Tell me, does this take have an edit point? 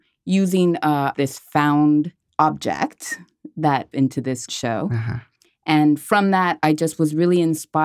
yes; 4 cuts; at 1.1 s, 2.3 s, 3.9 s, 4.5 s

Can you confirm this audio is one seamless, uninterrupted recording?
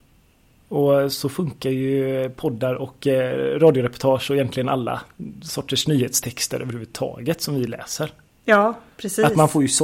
yes; 0 cuts

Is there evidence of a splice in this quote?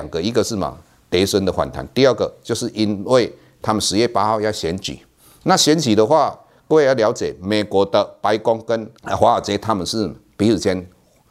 no; 0 cuts

